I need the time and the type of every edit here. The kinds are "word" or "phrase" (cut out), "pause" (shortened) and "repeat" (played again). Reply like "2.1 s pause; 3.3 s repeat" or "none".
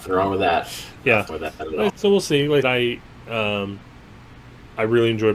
1.3 s word; 1.9 s word; 2.6 s word